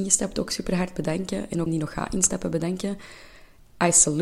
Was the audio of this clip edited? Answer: yes; 1 cut; at 1.7 s

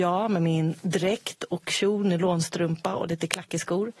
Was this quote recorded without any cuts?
yes; 0 cuts

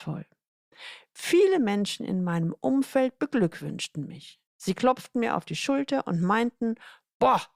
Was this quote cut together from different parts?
yes; 1 cut; at 4.5 s

